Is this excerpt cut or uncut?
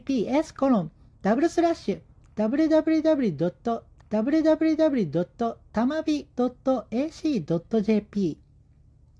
cut